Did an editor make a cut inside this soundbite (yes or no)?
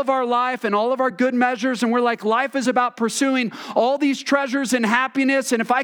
no